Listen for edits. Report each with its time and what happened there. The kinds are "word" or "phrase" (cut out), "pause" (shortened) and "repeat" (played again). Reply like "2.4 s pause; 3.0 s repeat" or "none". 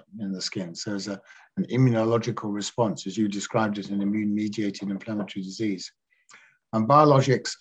none